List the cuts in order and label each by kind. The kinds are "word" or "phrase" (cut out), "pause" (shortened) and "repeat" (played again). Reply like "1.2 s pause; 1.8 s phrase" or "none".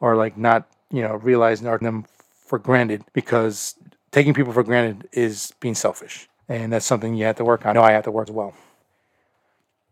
1.8 s word; 3.1 s pause; 6.4 s pause; 7.7 s phrase; 8.3 s phrase